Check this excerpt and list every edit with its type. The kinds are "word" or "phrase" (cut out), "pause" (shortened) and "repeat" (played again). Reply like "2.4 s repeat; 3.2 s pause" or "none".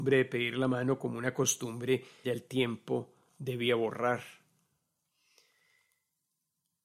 2.2 s word